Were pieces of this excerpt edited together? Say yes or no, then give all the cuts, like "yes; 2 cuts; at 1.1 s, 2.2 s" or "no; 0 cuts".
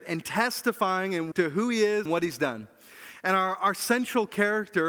yes; 2 cuts; at 1.3 s, 2.1 s